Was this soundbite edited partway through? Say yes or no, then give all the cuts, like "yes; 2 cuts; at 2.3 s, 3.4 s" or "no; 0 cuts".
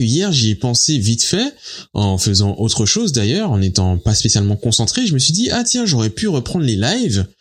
no; 0 cuts